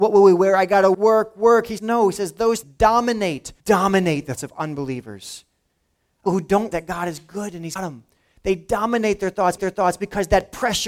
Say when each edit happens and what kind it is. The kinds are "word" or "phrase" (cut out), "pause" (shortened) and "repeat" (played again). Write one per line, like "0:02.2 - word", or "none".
0:00.9 - word
0:01.8 - word
0:02.6 - word
0:03.6 - pause
0:04.4 - word
0:06.3 - word
0:06.7 - word
0:07.8 - word
0:09.6 - repeat